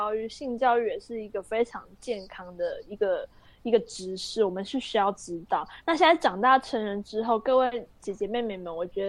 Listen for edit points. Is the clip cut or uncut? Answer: uncut